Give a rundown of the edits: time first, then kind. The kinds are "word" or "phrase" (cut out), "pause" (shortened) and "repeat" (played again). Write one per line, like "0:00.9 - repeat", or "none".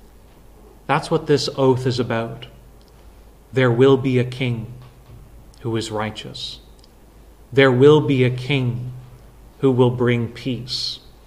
none